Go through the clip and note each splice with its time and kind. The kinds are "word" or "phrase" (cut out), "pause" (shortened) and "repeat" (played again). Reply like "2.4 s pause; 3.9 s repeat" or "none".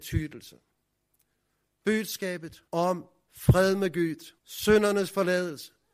2.7 s pause; 4.4 s pause